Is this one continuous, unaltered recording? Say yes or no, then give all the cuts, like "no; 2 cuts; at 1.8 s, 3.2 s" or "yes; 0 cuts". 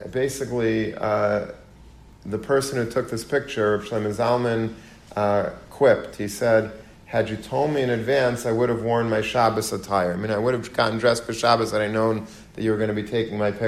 yes; 0 cuts